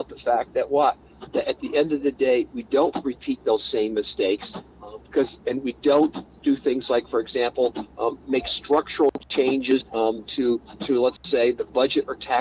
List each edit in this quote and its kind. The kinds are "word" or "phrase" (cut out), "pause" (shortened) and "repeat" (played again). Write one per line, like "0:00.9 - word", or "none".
0:09.9 - pause